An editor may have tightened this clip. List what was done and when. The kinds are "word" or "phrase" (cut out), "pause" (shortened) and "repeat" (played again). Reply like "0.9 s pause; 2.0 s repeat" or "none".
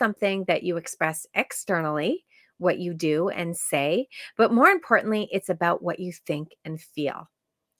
none